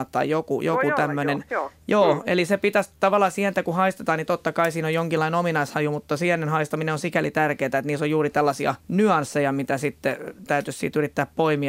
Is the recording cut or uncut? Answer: cut